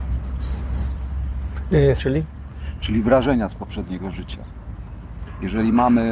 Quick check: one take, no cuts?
no; 1 cut; at 2.0 s

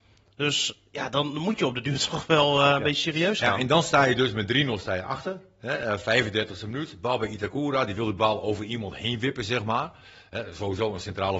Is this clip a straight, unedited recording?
yes; 0 cuts

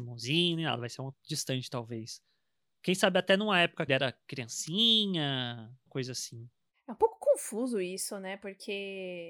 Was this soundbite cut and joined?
yes; 3 cuts; at 1.1 s, 3.9 s, 5.9 s

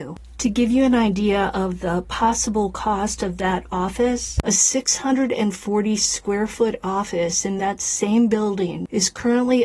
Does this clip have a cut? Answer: no; 0 cuts

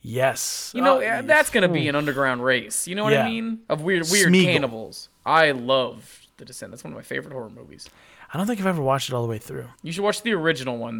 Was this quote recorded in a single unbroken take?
no; 2 cuts; at 3.6 s, 9.7 s

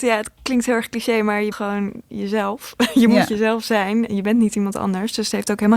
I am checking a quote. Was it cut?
yes; 2 cuts; at 1.5 s, 4.1 s

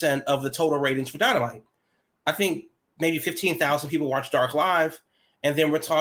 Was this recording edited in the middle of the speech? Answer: no; 0 cuts

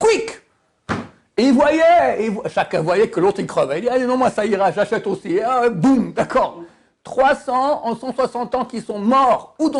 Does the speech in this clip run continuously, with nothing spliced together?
yes; 0 cuts

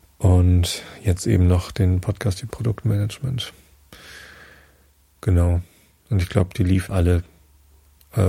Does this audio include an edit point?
yes; 2 cuts; at 2.5 s, 6.9 s

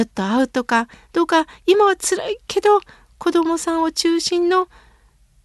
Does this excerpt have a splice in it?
no; 0 cuts

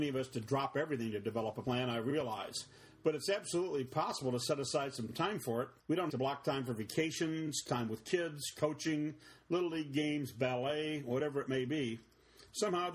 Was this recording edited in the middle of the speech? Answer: yes; 2 cuts; at 5.8 s, 6.1 s

